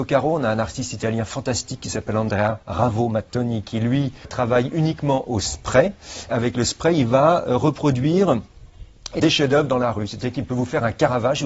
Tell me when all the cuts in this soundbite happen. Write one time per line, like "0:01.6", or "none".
0:02.6
0:04.2
0:06.3
0:09.2